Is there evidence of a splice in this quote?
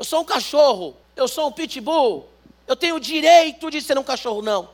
yes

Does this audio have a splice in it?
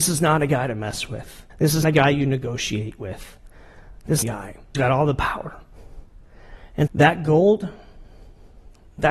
yes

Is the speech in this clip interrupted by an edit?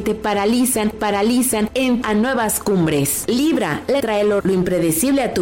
yes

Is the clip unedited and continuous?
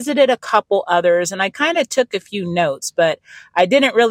yes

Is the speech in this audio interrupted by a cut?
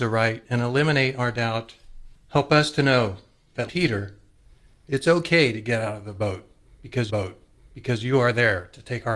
yes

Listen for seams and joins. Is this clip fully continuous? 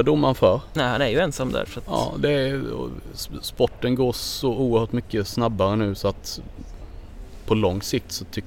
yes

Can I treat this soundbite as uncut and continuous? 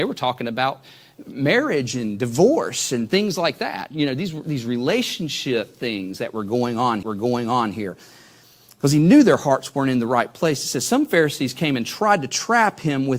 no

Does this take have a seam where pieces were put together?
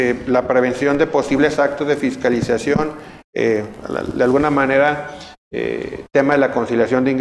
no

